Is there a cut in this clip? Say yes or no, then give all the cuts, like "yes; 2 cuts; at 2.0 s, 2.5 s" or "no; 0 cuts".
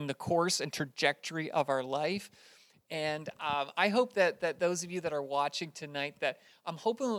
no; 0 cuts